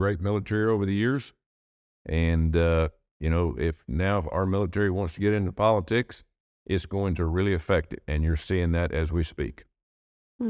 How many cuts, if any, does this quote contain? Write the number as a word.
zero